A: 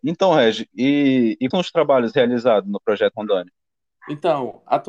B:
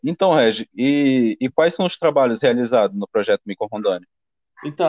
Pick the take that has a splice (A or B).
A